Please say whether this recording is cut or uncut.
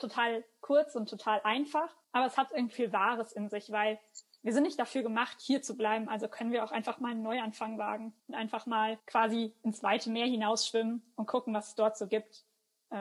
cut